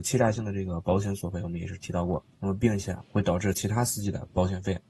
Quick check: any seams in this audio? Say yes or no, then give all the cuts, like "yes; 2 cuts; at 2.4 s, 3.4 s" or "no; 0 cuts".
yes; 1 cut; at 2.3 s